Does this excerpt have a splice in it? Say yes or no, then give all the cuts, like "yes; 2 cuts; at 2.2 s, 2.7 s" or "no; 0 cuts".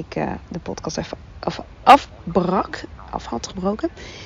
no; 0 cuts